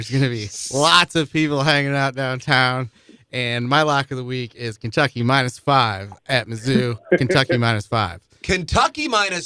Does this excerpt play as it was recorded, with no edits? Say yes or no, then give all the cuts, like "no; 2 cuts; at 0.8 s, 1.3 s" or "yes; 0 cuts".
yes; 0 cuts